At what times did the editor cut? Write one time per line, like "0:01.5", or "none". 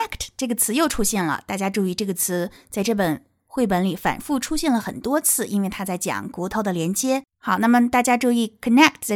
0:07.3